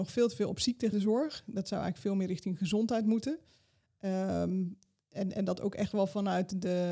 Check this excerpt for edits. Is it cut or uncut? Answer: cut